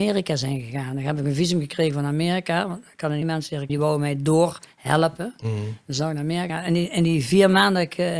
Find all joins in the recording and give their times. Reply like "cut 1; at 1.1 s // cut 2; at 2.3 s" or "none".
cut 1; at 3.2 s // cut 2; at 3.7 s // cut 3; at 6.5 s